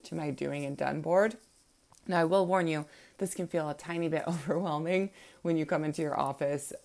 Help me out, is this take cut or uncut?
uncut